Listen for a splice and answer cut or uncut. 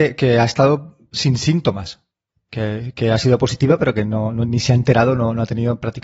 uncut